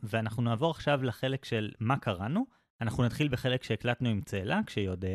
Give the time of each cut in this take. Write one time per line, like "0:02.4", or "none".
none